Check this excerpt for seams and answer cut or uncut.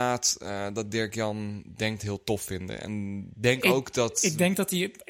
cut